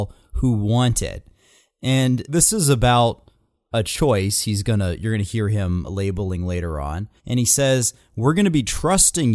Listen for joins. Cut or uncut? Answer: cut